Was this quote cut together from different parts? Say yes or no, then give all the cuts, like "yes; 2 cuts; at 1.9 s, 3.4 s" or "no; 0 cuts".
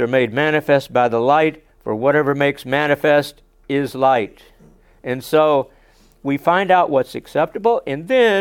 yes; 1 cut; at 1.7 s